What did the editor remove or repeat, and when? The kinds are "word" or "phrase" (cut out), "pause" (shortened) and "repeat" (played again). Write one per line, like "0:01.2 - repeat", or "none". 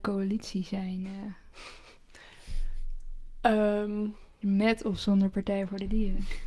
0:04.3 - pause